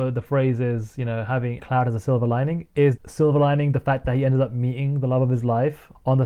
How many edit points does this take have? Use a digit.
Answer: 2